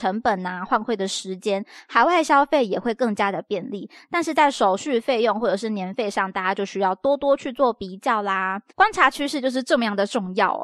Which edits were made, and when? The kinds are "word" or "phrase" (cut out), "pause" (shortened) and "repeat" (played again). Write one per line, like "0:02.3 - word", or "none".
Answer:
0:08.7 - pause